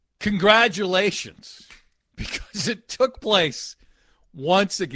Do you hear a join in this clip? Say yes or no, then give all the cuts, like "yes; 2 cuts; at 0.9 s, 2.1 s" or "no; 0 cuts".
no; 0 cuts